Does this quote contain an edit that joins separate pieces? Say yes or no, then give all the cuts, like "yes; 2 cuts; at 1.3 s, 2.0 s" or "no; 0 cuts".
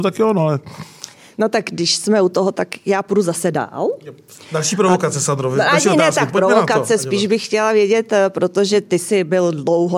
no; 0 cuts